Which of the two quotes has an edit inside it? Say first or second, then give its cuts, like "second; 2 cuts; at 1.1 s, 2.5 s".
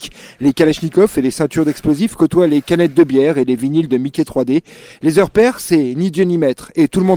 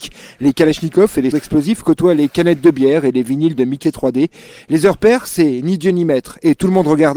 second; 1 cut; at 1.3 s